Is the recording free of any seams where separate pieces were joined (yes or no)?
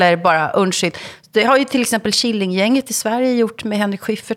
yes